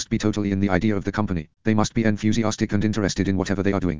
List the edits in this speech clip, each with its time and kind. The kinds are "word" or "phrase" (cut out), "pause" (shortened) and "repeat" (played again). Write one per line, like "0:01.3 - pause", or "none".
0:01.5 - pause